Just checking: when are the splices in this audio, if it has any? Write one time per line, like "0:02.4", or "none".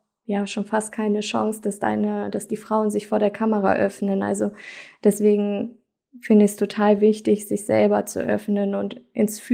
none